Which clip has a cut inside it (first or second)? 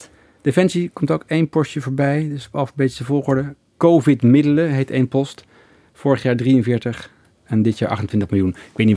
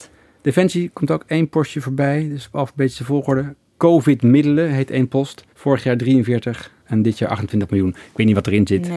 second